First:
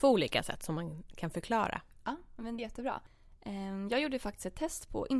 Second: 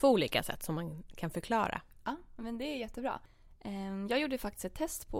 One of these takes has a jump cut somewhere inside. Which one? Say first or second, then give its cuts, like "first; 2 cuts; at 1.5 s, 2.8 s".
first; 1 cut; at 2.6 s